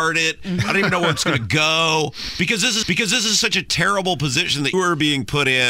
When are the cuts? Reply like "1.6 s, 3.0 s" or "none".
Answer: 2.8 s, 4.7 s